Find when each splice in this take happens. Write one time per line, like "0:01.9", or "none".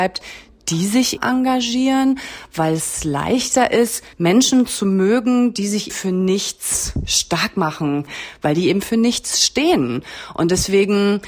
0:01.2
0:04.1
0:05.9